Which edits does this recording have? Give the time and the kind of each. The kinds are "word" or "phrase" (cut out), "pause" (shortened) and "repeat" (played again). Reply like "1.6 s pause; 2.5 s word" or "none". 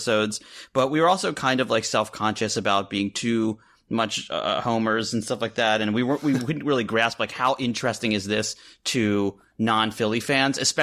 none